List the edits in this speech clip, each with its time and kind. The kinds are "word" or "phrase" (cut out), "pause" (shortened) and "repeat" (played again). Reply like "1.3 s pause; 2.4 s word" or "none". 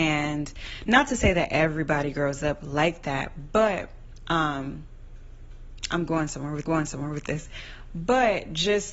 6.7 s repeat